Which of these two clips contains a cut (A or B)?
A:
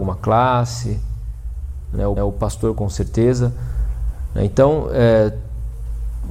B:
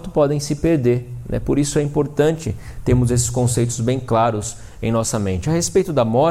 A